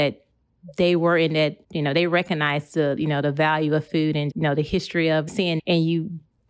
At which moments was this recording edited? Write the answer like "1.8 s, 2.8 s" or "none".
1.6 s, 4.3 s, 5.3 s, 5.6 s